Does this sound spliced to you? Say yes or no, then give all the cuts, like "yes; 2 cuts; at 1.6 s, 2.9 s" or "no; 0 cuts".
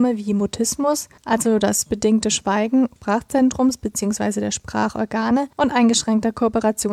yes; 4 cuts; at 1.2 s, 1.9 s, 3.0 s, 5.5 s